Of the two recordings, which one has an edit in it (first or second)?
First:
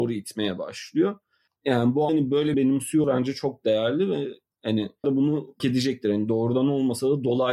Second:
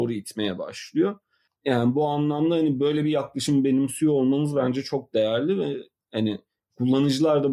first